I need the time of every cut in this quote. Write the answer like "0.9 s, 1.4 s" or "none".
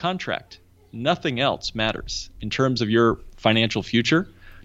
none